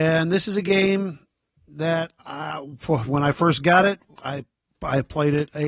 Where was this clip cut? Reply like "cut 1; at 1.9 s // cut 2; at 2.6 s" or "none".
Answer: none